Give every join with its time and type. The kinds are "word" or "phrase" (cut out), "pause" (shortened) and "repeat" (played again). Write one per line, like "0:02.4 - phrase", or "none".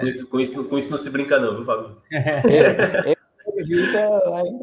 none